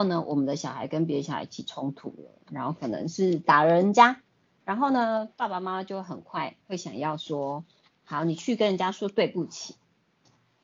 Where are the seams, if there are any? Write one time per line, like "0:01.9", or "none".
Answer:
none